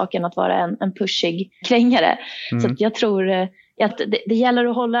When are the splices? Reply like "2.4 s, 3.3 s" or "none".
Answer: 1.6 s, 3.9 s